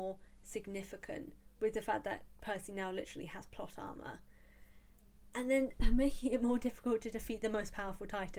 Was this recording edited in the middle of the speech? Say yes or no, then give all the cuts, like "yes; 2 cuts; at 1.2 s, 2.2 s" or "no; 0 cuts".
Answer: no; 0 cuts